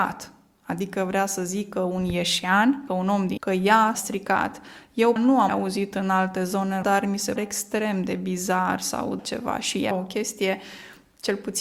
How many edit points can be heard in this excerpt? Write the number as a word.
nine